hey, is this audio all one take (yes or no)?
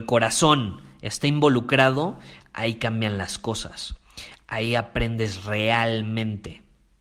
yes